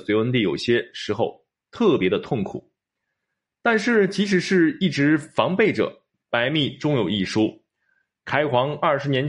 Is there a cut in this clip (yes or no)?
no